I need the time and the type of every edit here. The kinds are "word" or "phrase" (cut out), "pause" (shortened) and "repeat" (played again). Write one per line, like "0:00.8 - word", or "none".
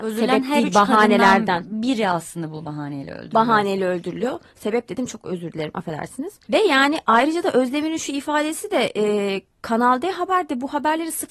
0:06.4 - pause